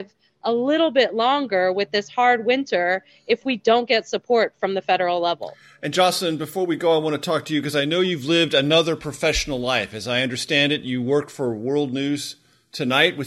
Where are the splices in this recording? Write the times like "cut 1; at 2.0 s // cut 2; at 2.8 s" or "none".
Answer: none

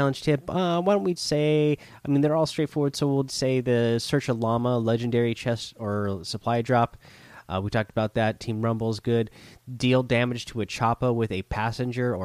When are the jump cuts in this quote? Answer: cut 1; at 1.2 s // cut 2; at 3.3 s

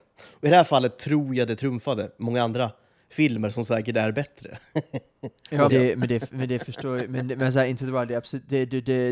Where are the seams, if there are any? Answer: cut 1; at 5.7 s

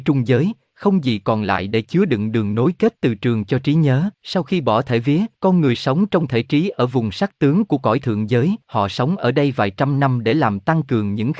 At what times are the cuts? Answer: cut 1; at 4.1 s // cut 2; at 5.3 s // cut 3; at 8.6 s

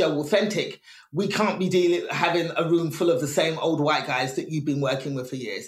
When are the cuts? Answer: none

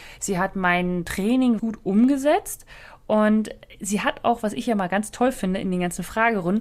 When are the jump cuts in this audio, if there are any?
cut 1; at 1.6 s

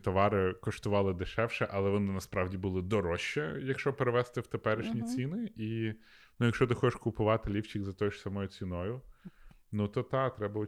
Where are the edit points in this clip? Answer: none

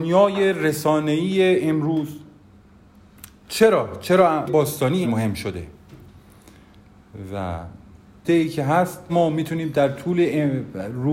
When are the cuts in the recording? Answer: cut 1; at 4.5 s // cut 2; at 5.0 s // cut 3; at 8.2 s // cut 4; at 9.1 s

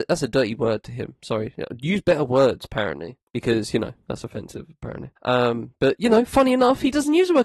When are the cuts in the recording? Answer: cut 1; at 3.2 s // cut 2; at 5.2 s

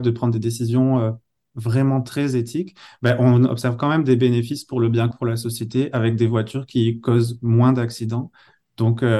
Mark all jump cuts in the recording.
cut 1; at 5.1 s

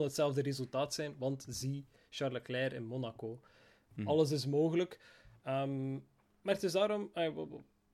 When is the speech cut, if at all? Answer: none

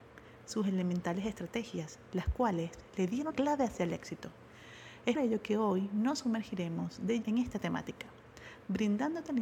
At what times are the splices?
cut 1; at 3.3 s // cut 2; at 5.2 s // cut 3; at 7.2 s

